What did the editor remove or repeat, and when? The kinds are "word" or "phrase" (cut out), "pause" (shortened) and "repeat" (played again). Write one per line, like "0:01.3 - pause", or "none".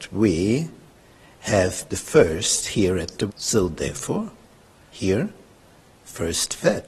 0:01.9 - word
0:03.3 - word
0:04.9 - word